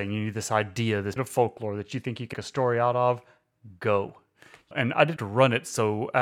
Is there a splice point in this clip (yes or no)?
yes